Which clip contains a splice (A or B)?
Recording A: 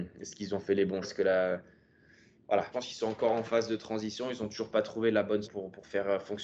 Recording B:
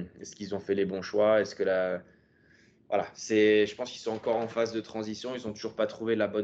A